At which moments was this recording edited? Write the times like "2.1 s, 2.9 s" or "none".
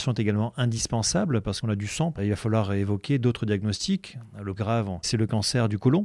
1.6 s, 2.2 s, 4.6 s, 5.0 s